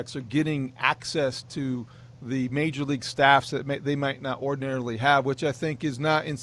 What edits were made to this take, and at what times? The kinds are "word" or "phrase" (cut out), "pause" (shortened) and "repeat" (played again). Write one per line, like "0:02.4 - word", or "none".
none